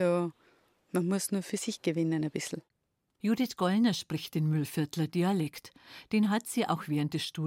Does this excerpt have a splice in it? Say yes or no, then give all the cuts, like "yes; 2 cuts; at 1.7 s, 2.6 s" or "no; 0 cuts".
no; 0 cuts